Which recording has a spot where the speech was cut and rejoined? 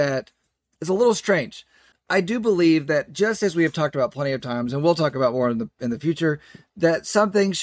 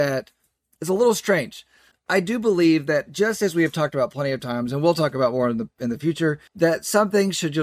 second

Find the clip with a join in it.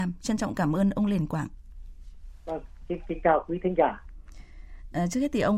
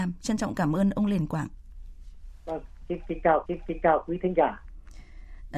second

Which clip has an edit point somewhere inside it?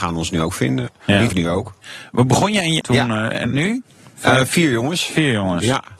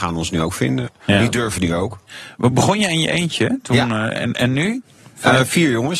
first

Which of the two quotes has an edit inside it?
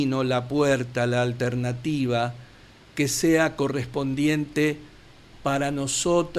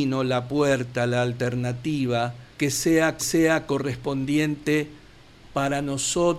second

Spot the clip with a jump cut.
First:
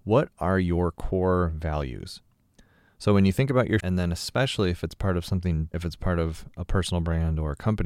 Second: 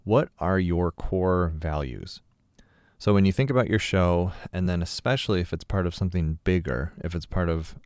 first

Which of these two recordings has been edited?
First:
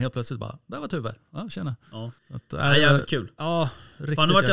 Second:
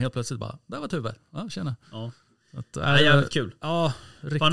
first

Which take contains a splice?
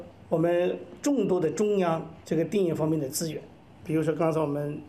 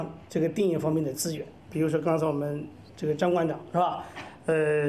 second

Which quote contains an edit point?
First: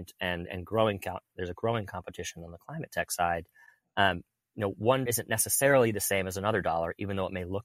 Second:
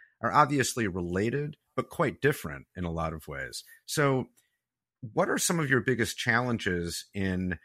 first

